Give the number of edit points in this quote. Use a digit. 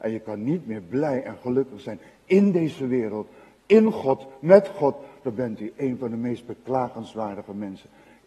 0